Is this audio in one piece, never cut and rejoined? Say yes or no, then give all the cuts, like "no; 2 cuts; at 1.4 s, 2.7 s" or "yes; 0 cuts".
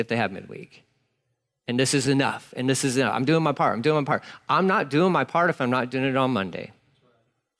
yes; 0 cuts